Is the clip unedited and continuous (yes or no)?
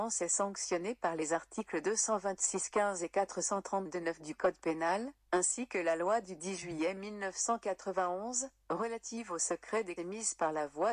no